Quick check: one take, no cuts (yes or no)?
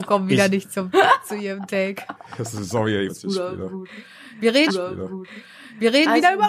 no